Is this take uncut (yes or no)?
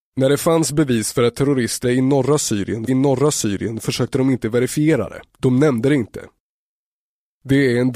no